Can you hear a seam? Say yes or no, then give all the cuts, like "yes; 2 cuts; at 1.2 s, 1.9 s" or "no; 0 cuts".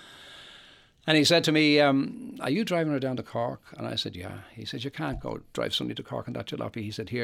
no; 0 cuts